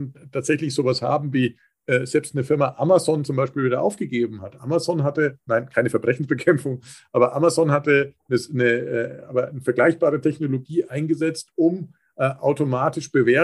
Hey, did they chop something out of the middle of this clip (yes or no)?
no